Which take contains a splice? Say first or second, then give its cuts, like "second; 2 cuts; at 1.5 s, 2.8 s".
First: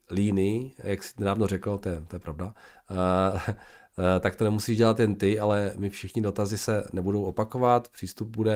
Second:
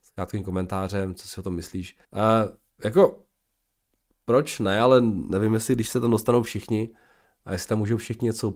second; 1 cut; at 2.0 s